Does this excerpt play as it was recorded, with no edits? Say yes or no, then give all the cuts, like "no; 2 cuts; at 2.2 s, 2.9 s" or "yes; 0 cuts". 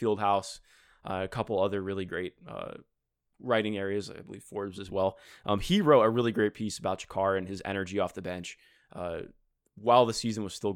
yes; 0 cuts